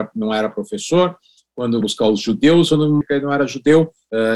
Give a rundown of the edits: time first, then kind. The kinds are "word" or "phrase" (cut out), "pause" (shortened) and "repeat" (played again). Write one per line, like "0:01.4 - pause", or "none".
0:01.8 - word
0:03.0 - word